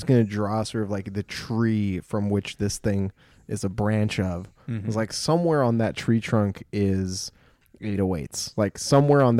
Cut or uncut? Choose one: uncut